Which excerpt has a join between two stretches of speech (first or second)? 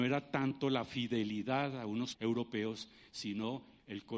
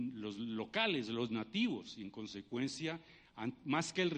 first